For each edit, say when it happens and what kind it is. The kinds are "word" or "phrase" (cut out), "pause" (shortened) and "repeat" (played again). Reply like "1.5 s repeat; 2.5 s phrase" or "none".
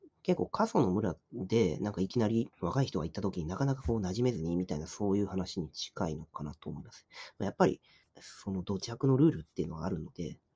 1.2 s pause; 2.5 s pause; 8.0 s pause